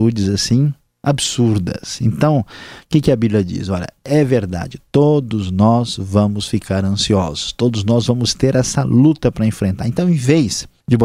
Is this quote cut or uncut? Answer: uncut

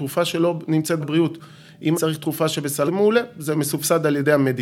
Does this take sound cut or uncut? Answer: cut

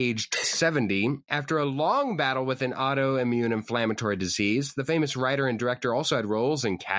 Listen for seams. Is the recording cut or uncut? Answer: uncut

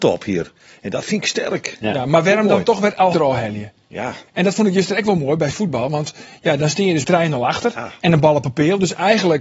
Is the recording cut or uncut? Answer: cut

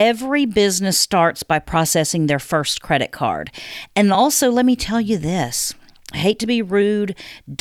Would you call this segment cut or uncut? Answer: uncut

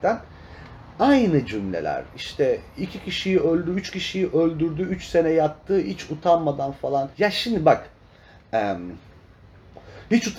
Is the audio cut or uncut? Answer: cut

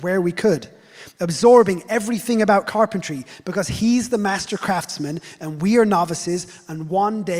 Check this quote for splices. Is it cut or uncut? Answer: uncut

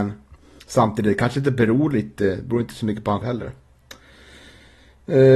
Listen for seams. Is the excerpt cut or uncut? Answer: cut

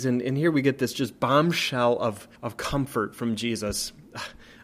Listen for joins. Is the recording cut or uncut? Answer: cut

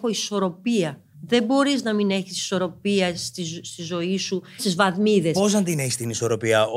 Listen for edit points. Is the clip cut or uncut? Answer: cut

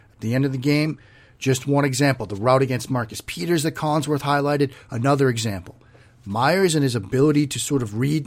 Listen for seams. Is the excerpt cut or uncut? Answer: uncut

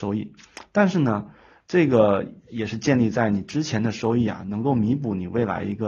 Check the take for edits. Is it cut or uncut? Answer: uncut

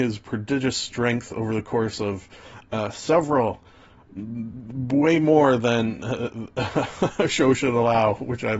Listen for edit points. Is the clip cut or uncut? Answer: uncut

